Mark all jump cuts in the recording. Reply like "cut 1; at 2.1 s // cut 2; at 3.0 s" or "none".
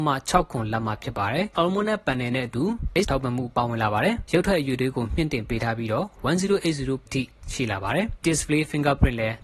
cut 1; at 1.5 s // cut 2; at 3.0 s // cut 3; at 7.1 s // cut 4; at 8.2 s